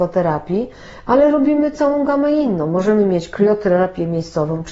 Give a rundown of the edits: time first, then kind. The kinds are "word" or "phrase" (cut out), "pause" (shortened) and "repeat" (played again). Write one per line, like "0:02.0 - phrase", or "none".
none